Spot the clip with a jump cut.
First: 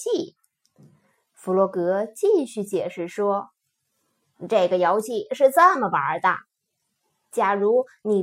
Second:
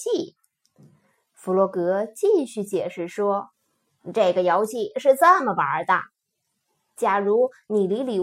second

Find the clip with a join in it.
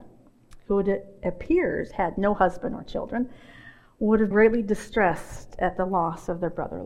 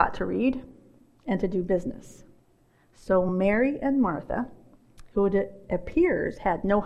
first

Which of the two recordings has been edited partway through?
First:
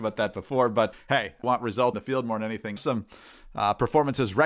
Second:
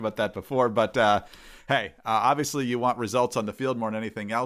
first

